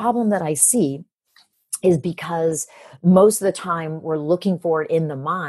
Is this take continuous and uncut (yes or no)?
yes